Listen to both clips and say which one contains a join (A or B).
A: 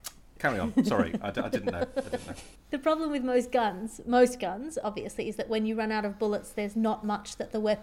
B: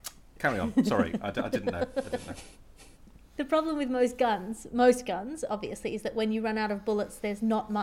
A